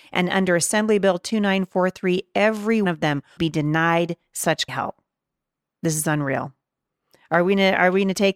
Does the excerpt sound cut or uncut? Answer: cut